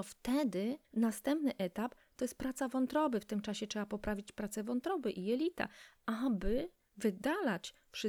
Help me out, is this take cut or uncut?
uncut